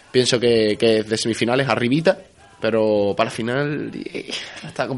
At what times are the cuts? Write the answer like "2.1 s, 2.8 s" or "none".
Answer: none